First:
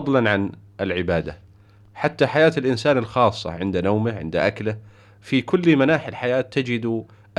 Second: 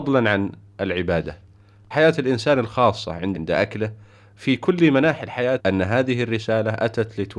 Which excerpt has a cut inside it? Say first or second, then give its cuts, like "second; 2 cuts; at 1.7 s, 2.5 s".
second; 3 cuts; at 1.9 s, 3.3 s, 5.6 s